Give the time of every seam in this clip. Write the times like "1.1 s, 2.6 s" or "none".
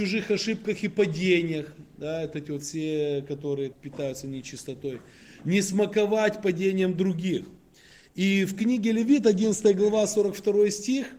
2.3 s, 3.7 s

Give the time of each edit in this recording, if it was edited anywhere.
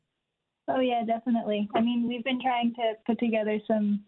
none

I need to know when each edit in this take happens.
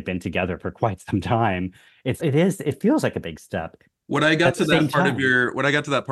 2.2 s

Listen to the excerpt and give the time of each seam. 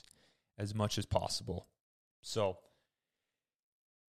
none

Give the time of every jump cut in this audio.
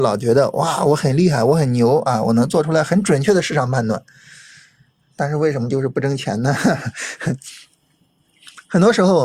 none

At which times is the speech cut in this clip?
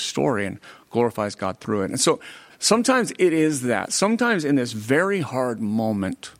2.5 s

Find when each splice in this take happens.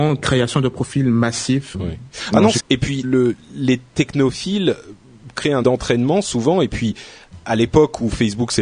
1.7 s, 2.6 s, 3.0 s, 5.6 s

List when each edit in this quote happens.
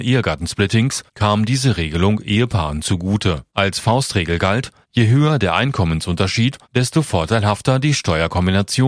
1.1 s, 3.5 s, 4.8 s, 6.6 s

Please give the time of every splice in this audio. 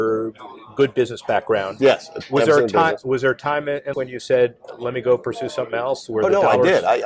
3.9 s

